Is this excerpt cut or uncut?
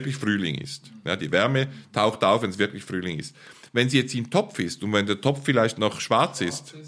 uncut